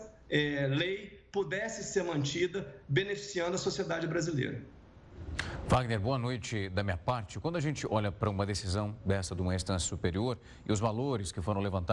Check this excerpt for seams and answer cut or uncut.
uncut